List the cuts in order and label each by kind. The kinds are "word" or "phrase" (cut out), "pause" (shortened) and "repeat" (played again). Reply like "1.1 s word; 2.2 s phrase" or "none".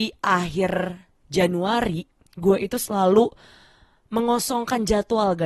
none